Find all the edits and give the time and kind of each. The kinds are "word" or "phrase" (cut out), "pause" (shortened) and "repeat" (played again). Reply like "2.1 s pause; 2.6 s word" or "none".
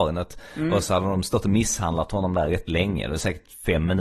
none